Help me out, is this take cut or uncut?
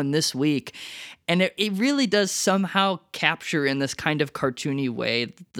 uncut